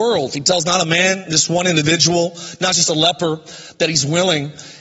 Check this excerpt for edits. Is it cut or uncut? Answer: uncut